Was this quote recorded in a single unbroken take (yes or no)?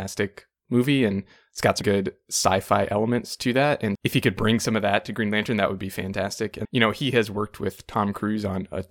no